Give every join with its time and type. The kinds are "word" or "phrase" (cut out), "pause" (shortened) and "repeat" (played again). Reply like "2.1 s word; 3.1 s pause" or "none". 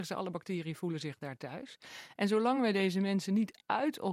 none